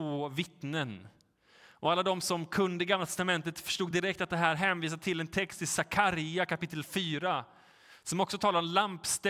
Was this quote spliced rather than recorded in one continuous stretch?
no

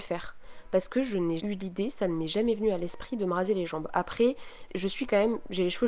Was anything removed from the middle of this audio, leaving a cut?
yes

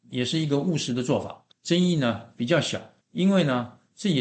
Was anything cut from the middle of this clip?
yes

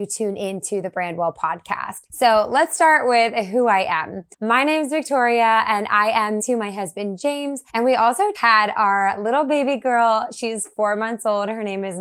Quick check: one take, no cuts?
no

